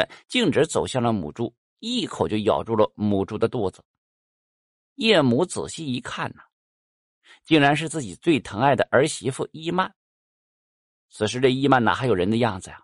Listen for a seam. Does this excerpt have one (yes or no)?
no